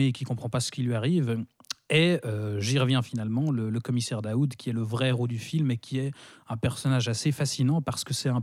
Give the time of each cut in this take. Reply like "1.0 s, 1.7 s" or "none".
none